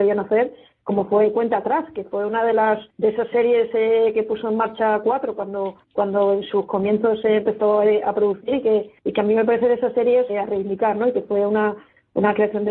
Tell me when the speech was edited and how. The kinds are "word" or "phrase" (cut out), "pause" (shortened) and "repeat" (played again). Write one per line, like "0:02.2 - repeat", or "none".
0:02.9 - pause
0:05.8 - pause
0:09.0 - pause
0:10.3 - word